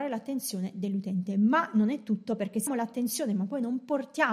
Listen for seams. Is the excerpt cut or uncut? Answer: cut